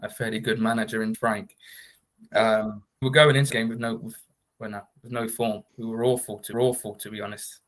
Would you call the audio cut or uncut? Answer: cut